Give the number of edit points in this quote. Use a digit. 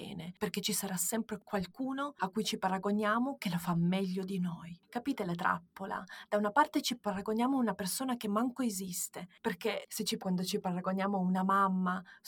2